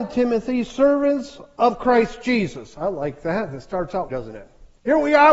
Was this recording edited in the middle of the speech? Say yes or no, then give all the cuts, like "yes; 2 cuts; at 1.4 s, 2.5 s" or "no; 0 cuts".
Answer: yes; 1 cut; at 4.1 s